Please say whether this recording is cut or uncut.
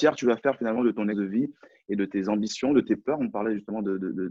cut